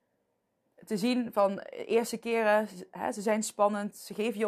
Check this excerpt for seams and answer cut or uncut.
uncut